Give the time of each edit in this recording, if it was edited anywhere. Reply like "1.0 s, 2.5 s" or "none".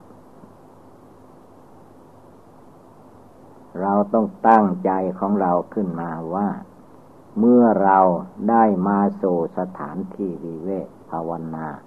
6.9 s